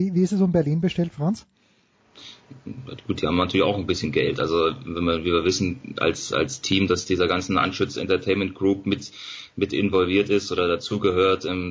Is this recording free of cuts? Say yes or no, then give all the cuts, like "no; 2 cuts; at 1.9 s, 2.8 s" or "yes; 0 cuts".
yes; 0 cuts